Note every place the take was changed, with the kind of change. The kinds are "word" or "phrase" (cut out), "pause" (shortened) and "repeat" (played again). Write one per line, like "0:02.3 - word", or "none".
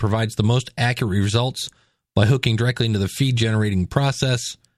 none